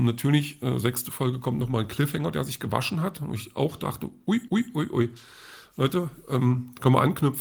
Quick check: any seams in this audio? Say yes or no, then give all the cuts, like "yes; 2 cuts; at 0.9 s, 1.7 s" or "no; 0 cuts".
yes; 1 cut; at 4.5 s